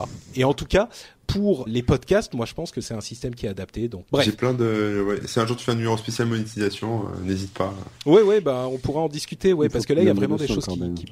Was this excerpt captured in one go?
no; 2 cuts; at 1.7 s, 4.1 s

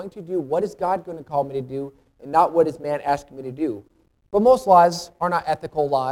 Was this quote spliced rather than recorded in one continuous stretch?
no; 0 cuts

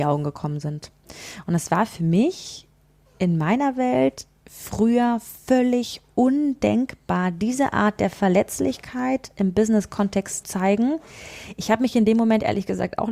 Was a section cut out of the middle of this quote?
yes; 2 cuts; at 4.4 s, 10.4 s

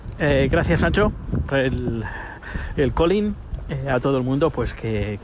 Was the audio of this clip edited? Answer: yes; 2 cuts; at 1.5 s, 3.9 s

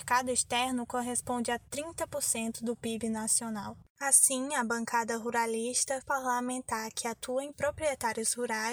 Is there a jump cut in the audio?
yes; 3 cuts; at 1.7 s, 6.0 s, 7.5 s

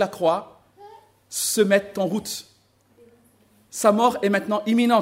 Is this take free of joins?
yes; 0 cuts

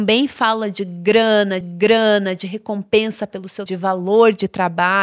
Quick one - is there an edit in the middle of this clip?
yes; 2 cuts; at 1.6 s, 3.7 s

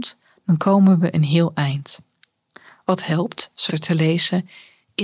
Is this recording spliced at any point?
yes; 1 cut; at 3.7 s

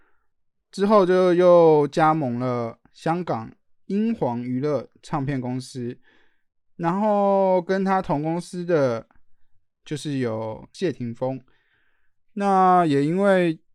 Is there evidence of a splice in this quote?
no; 0 cuts

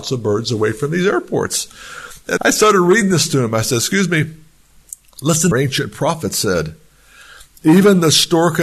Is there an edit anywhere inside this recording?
yes; 2 cuts; at 2.4 s, 5.5 s

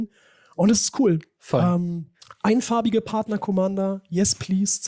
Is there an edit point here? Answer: yes; 1 cut; at 2.1 s

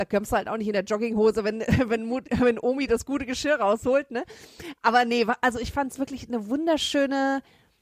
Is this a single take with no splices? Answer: yes; 0 cuts

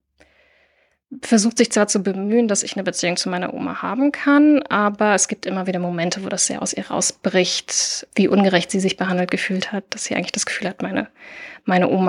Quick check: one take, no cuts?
yes; 0 cuts

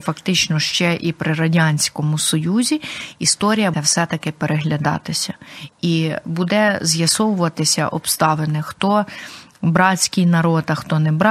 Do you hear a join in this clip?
yes; 1 cut; at 3.7 s

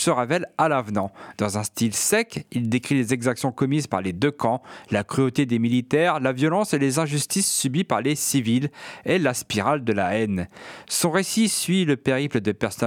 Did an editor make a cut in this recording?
no; 0 cuts

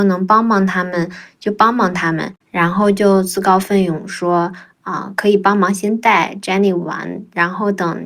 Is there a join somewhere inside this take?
yes; 1 cut; at 2.4 s

